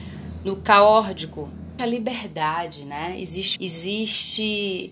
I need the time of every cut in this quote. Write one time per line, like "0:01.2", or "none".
0:01.8
0:03.6